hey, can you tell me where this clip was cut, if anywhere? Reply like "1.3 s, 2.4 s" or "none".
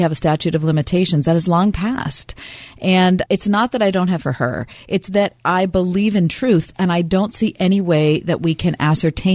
3.3 s, 4.2 s